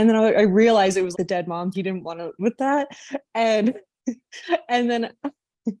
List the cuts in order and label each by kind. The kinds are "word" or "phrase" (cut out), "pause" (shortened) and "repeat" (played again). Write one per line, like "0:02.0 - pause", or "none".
0:01.1 - word
0:01.7 - phrase
0:02.4 - word